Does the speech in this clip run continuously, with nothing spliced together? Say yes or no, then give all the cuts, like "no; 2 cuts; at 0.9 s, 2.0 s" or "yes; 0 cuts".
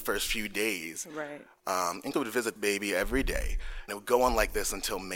no; 3 cuts; at 2.1 s, 2.6 s, 3.9 s